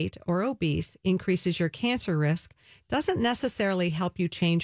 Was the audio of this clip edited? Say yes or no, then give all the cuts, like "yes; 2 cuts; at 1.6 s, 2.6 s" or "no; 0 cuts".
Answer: no; 0 cuts